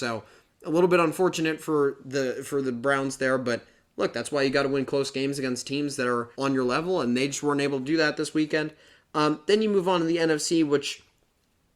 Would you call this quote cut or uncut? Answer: cut